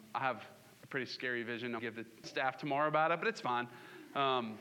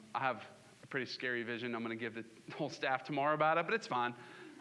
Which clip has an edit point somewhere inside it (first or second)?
first